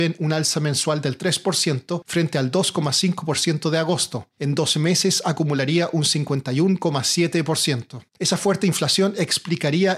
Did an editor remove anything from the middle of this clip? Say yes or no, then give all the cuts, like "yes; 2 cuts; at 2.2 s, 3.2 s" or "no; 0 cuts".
yes; 1 cut; at 8.1 s